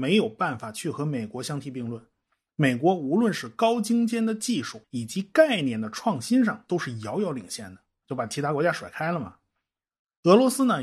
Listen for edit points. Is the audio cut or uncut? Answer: cut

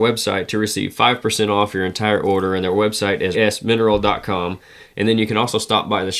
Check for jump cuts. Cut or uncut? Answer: cut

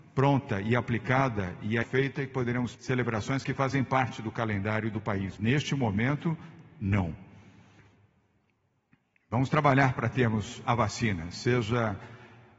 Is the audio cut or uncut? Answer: cut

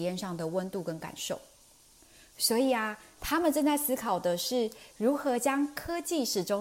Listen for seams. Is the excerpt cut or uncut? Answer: uncut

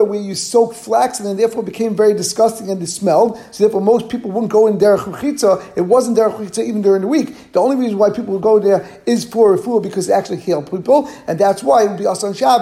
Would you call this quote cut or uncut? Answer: uncut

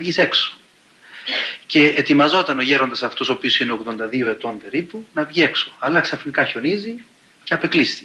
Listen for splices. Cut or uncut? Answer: uncut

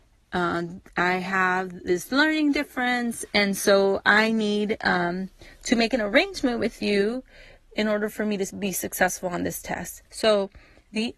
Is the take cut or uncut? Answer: cut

